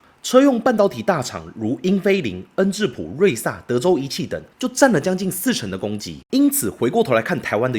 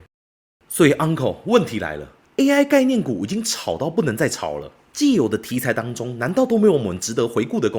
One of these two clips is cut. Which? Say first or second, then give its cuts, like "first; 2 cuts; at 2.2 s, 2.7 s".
first; 1 cut; at 6.3 s